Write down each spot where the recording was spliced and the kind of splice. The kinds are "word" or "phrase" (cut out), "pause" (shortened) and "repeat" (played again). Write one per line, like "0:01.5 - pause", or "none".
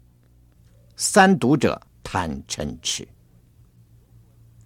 0:01.9 - pause